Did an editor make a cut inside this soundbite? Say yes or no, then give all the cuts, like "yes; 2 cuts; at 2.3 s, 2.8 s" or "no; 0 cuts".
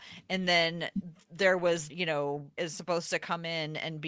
yes; 2 cuts; at 1.9 s, 2.6 s